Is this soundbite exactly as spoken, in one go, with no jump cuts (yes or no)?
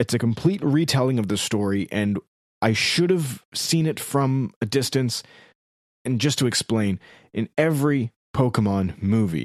yes